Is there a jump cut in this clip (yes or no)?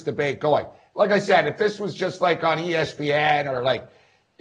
no